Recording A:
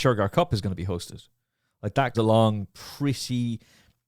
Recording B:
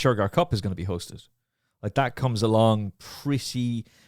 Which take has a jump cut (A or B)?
A